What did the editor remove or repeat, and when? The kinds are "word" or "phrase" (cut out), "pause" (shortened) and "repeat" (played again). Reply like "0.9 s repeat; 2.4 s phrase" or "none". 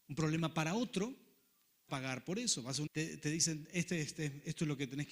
1.9 s phrase; 2.9 s word